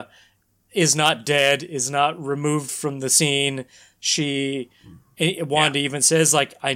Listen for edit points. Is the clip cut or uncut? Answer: uncut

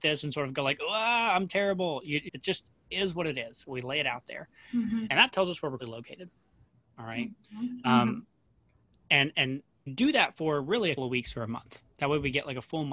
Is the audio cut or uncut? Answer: cut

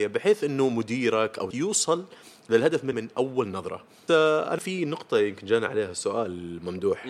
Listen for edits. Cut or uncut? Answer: cut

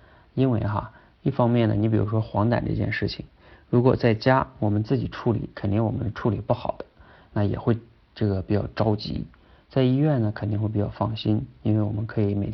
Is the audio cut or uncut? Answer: uncut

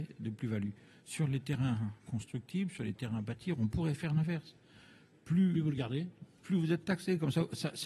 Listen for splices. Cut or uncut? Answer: uncut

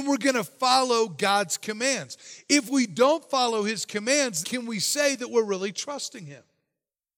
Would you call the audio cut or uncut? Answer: cut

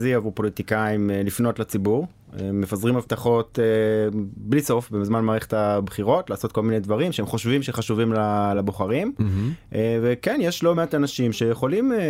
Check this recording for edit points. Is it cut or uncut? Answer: uncut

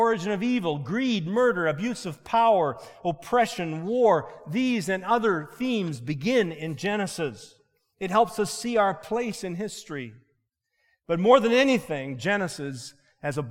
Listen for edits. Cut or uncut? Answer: uncut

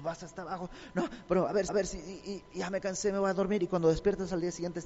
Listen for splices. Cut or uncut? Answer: cut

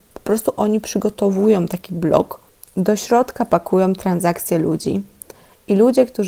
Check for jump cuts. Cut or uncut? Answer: uncut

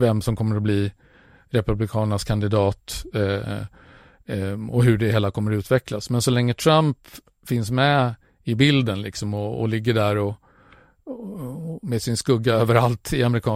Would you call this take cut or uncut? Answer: uncut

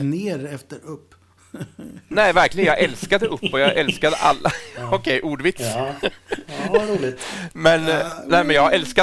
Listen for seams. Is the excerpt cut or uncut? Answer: uncut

